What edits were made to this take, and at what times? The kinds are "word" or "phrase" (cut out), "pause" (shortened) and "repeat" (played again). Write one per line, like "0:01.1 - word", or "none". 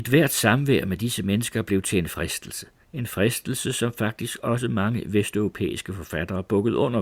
0:02.1 - word
0:02.8 - pause